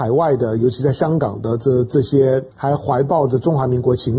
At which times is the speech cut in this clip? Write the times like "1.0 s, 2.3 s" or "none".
2.5 s